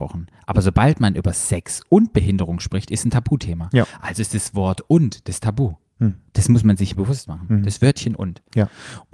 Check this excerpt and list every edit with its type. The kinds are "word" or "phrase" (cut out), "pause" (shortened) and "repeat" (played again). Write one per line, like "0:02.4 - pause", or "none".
0:06.9 - phrase